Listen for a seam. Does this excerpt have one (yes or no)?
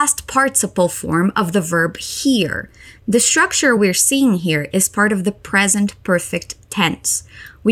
no